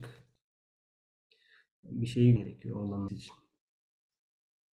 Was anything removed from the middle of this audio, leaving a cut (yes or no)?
yes